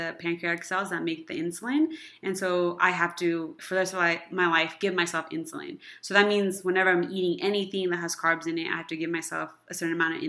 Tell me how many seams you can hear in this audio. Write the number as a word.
one